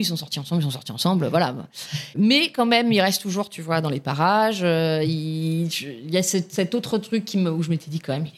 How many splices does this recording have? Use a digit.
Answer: 0